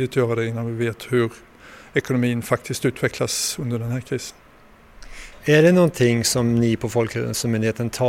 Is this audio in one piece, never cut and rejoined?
yes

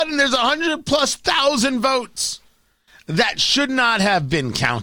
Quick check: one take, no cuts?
yes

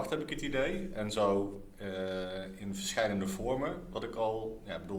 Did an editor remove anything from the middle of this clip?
no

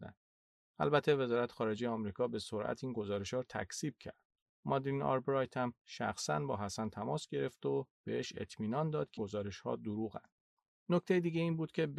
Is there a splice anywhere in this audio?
yes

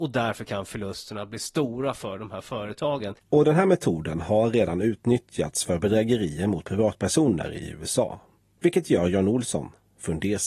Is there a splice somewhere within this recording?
no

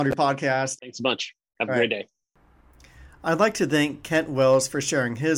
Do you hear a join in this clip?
no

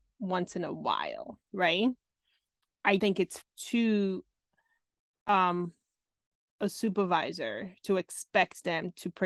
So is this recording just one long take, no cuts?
no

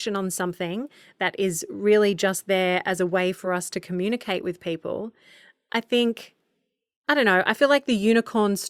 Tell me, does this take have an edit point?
no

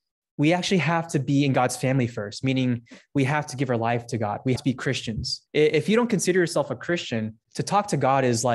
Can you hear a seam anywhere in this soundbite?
yes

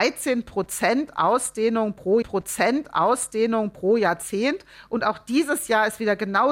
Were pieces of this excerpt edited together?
yes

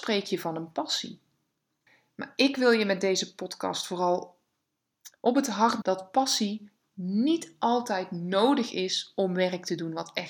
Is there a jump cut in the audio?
yes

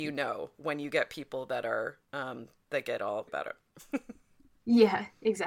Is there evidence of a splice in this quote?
yes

